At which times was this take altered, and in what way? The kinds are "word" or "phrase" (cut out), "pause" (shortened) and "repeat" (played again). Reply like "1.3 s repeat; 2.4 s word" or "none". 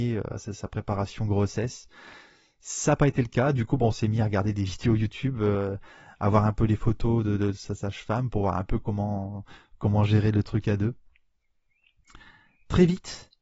none